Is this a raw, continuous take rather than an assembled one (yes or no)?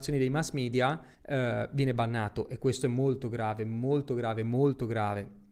no